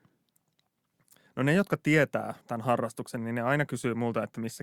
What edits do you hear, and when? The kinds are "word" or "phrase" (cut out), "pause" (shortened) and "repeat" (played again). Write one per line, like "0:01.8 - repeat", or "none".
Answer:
0:02.4 - pause

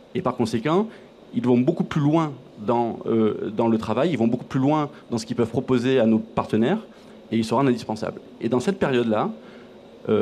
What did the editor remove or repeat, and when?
none

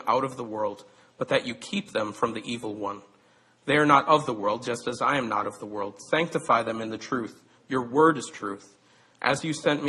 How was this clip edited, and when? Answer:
none

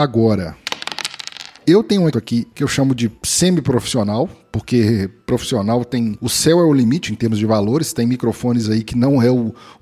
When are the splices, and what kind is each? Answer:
0:02.1 - word

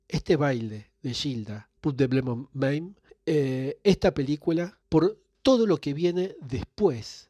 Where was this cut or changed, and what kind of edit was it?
0:01.8 - pause
0:03.1 - pause
0:04.8 - pause

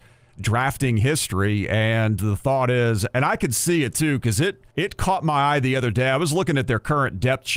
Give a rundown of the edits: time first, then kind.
0:04.7 - pause

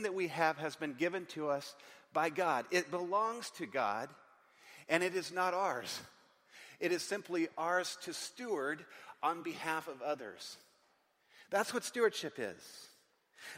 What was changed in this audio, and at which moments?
none

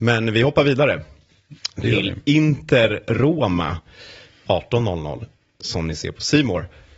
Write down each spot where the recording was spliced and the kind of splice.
none

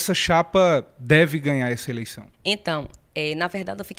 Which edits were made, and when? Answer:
0:02.3 - pause

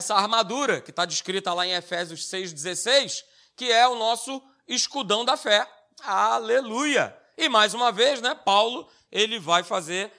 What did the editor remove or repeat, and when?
none

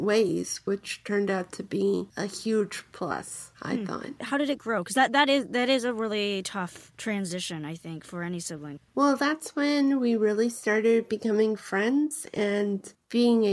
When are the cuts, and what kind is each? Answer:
0:08.9 - pause

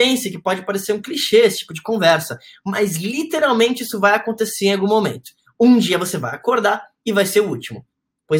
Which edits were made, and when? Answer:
none

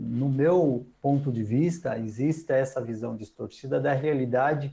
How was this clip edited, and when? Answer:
none

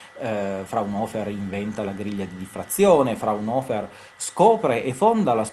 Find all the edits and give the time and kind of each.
none

